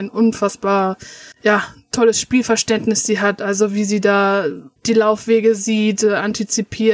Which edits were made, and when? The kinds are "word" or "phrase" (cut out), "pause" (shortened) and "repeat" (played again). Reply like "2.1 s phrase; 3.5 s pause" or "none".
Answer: 1.3 s pause; 4.8 s pause